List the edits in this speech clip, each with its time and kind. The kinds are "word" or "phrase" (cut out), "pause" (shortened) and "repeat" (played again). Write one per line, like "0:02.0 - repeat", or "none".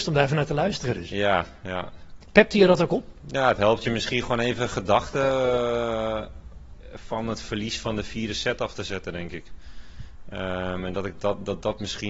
none

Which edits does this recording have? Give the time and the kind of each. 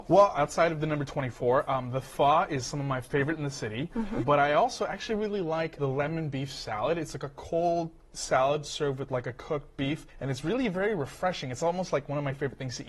0:10.1 - pause

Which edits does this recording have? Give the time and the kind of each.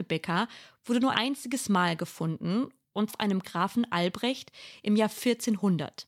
0:01.1 - word
0:03.1 - word
0:03.4 - phrase

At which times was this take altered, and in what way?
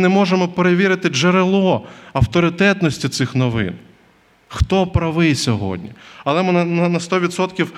none

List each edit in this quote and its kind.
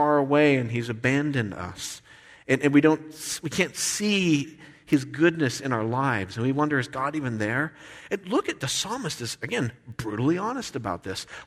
none

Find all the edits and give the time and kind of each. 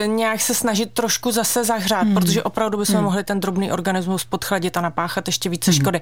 none

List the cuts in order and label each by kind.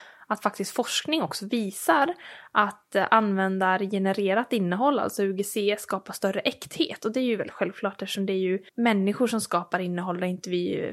0:08.7 - pause

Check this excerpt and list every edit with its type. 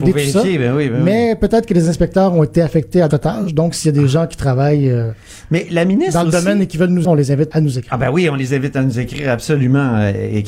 0:03.1 - word
0:07.0 - word
0:07.5 - word

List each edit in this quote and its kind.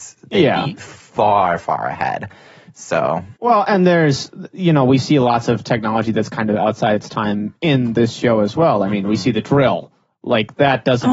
0:03.4 - pause

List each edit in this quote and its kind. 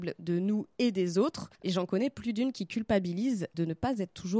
0:01.5 - pause

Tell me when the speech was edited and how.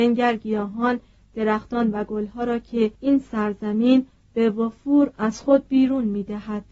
0:02.9 - pause

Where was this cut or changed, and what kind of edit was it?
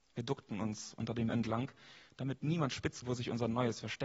0:01.3 - word
0:03.0 - word

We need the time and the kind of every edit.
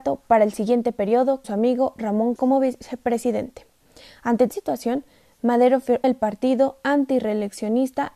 0:01.4 - word
0:02.4 - word
0:04.5 - word
0:06.0 - word

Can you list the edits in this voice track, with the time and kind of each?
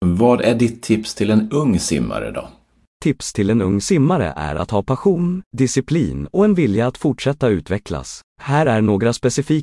none

